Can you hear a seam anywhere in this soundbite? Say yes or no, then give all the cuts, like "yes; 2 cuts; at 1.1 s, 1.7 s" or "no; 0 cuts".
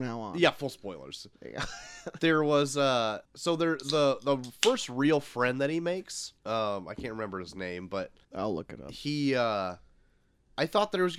yes; 3 cuts; at 3.3 s, 6.4 s, 8.2 s